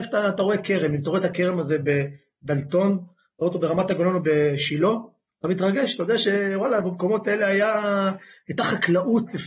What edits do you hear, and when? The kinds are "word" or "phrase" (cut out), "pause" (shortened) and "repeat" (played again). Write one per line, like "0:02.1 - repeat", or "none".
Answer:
none